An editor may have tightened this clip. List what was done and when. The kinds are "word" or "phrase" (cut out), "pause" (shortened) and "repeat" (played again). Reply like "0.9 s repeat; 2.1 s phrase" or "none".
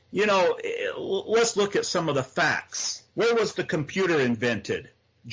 1.5 s word; 3.1 s pause